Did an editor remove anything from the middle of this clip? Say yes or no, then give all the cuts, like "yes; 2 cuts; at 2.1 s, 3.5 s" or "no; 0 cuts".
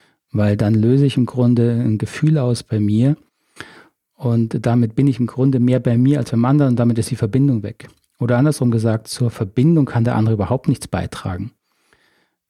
no; 0 cuts